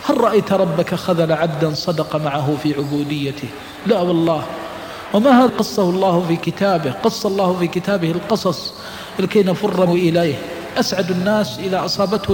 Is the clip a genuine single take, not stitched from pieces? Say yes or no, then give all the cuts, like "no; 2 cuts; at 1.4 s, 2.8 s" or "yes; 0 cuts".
no; 2 cuts; at 5.5 s, 9.9 s